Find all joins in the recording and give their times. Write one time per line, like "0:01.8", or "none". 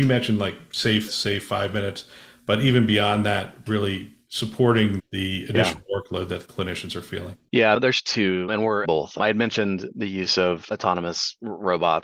0:01.1
0:08.8